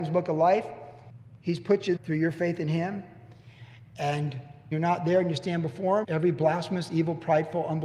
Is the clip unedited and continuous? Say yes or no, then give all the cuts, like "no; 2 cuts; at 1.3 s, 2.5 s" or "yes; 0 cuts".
no; 3 cuts; at 2.0 s, 4.7 s, 6.0 s